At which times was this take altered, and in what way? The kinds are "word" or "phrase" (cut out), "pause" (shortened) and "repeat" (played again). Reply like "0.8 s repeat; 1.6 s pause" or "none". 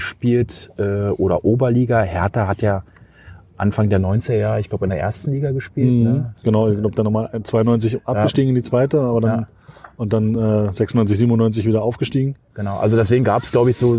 none